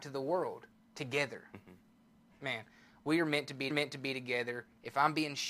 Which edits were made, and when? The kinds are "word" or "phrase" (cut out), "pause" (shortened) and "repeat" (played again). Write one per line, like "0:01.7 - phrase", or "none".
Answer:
0:03.7 - repeat